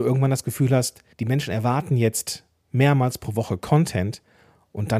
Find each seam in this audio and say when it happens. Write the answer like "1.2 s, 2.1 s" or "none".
1.1 s